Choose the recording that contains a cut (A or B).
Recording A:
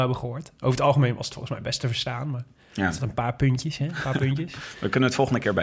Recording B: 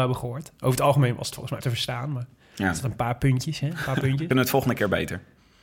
B